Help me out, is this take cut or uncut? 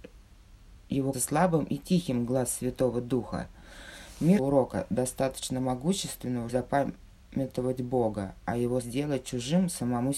cut